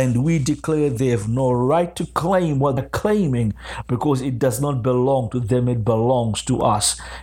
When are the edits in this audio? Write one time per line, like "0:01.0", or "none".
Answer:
0:02.8